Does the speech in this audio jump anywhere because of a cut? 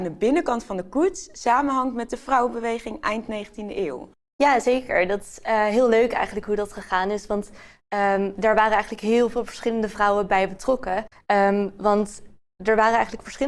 no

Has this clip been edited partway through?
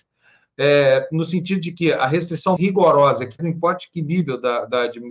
yes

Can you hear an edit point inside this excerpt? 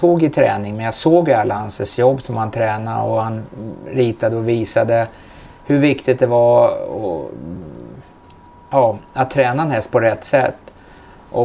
no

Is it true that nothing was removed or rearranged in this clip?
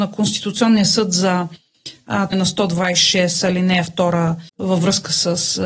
no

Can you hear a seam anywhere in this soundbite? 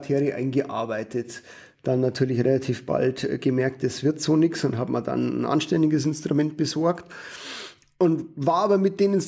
no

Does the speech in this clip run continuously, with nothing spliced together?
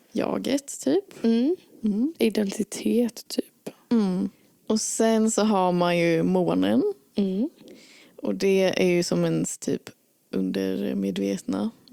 yes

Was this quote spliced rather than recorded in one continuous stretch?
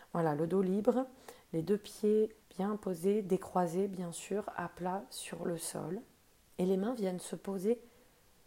yes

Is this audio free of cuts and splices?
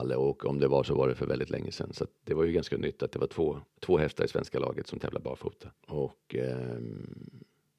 no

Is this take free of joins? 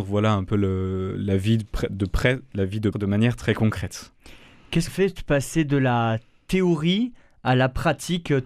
no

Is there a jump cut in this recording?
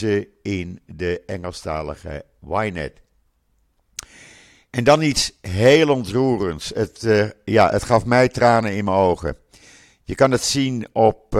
no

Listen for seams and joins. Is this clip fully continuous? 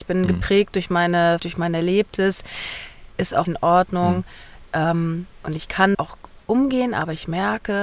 no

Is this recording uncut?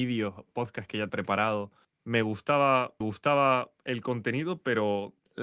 no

